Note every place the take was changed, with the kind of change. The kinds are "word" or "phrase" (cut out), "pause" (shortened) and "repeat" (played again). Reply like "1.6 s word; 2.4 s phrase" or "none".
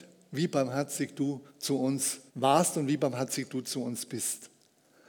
1.5 s pause; 2.3 s pause